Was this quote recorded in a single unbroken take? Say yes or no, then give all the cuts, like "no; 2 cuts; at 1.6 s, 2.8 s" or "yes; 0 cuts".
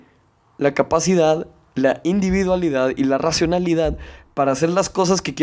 yes; 0 cuts